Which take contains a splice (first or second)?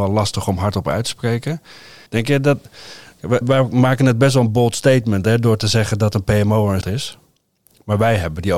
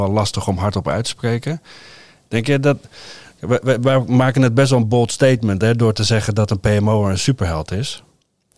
first